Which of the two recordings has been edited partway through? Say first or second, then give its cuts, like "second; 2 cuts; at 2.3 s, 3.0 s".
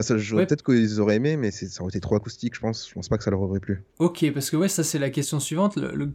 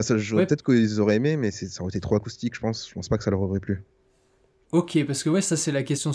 first; 1 cut; at 3.9 s